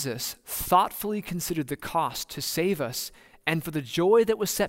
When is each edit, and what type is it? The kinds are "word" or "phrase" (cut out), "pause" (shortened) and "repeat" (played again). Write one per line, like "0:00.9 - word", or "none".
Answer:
none